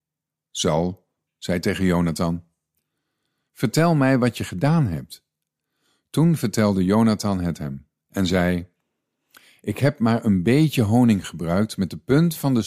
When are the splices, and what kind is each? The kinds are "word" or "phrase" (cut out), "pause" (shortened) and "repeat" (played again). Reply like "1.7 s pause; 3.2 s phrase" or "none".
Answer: none